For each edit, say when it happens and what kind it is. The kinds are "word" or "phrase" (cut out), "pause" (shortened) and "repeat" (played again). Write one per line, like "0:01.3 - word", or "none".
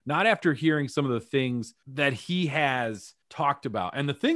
0:01.8 - pause
0:03.2 - pause